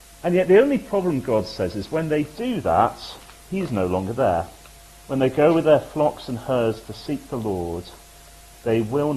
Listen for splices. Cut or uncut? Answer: cut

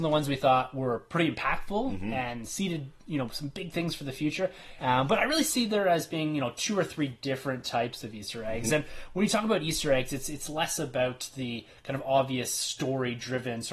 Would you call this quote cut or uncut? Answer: uncut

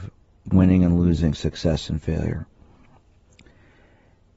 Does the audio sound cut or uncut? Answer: uncut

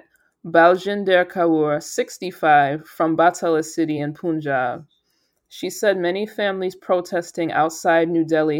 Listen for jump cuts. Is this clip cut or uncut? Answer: uncut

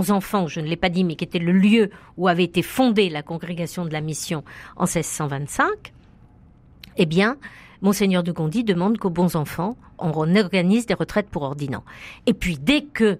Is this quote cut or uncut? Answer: uncut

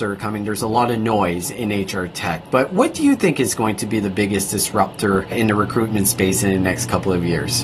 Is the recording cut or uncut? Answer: uncut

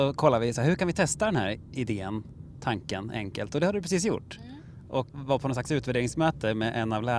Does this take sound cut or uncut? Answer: cut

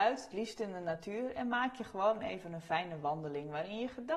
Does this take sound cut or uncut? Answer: uncut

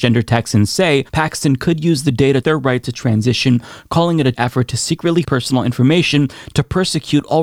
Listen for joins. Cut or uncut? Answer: cut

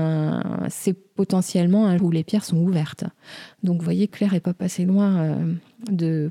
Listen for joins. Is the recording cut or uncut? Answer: cut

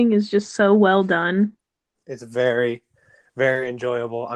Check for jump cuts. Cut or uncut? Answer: cut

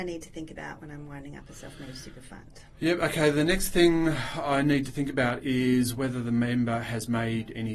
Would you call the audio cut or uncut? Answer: uncut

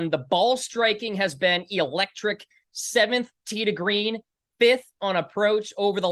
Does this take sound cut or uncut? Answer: uncut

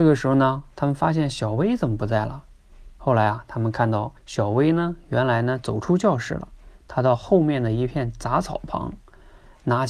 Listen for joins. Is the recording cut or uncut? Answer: cut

